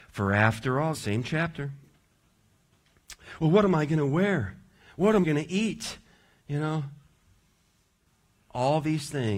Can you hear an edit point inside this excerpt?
yes; 2 cuts; at 0.9 s, 5.2 s

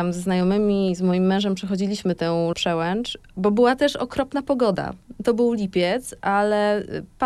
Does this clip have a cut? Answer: yes; 1 cut; at 2.5 s

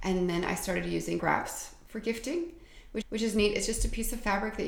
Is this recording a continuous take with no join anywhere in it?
no; 2 cuts; at 1.2 s, 3.0 s

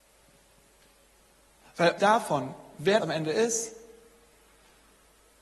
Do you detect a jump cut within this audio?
yes; 2 cuts; at 2.0 s, 3.0 s

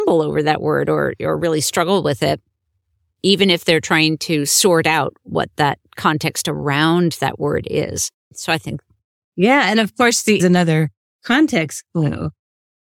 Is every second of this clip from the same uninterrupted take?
no; 1 cut; at 10.4 s

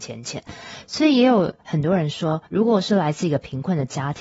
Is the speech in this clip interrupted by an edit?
yes; 1 cut; at 2.5 s

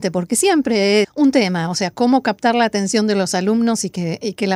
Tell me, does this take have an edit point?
yes; 1 cut; at 1.0 s

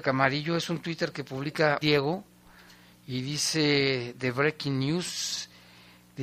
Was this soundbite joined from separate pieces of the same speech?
yes; 1 cut; at 1.8 s

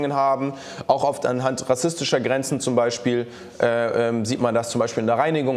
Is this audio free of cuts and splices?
yes; 0 cuts

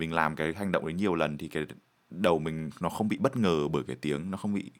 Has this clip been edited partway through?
no; 0 cuts

